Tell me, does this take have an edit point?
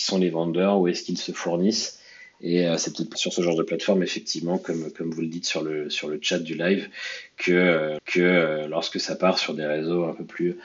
yes; 2 cuts; at 3.1 s, 8.0 s

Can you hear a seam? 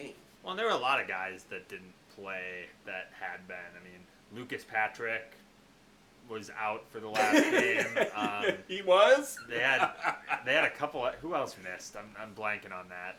no; 0 cuts

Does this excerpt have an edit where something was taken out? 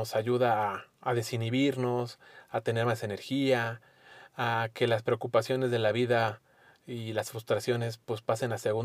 no; 0 cuts

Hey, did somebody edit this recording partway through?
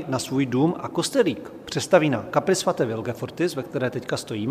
no; 0 cuts

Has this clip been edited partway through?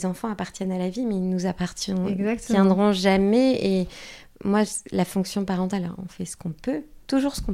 no; 0 cuts

